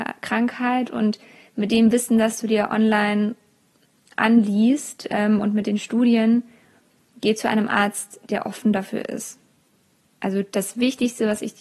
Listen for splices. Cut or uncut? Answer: uncut